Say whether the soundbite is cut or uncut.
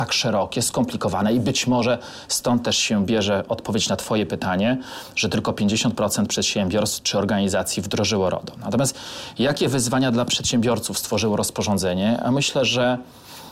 uncut